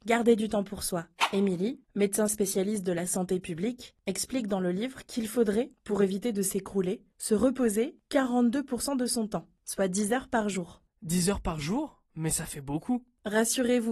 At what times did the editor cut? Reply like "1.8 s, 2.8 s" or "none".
1.8 s, 12.1 s